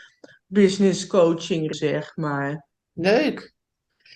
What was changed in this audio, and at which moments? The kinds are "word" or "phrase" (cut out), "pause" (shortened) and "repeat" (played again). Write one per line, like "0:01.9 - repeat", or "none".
0:01.7 - word

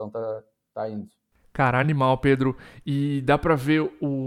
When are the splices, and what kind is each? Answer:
none

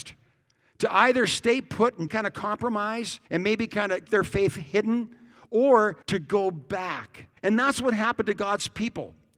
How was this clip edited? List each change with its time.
0:02.1 - word
0:03.3 - pause
0:04.1 - word
0:06.0 - pause
0:07.4 - pause

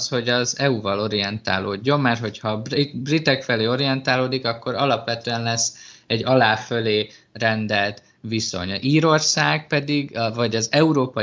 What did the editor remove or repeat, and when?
none

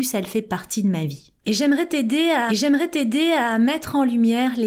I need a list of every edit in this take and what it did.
0:01.4 - pause
0:02.5 - repeat

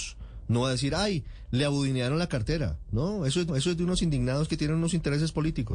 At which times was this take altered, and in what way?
0:03.5 - repeat

